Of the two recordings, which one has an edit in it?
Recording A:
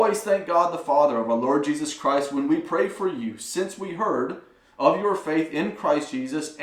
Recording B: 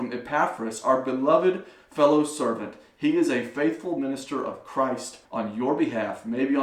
B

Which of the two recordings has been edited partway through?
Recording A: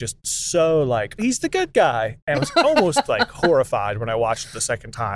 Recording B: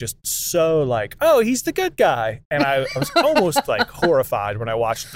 A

